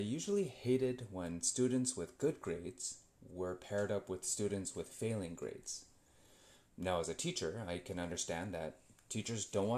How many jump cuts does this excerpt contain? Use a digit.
0